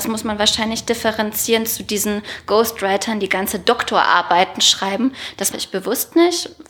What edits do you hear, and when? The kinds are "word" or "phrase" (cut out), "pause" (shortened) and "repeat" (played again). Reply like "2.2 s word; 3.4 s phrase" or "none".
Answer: 5.5 s word